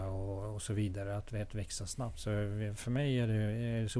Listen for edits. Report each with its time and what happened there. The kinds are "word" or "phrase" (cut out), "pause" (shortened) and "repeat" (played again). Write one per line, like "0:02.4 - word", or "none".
none